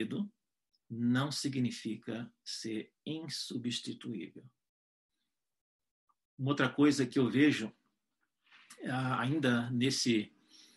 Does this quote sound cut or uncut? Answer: uncut